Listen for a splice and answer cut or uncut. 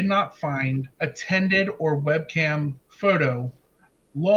cut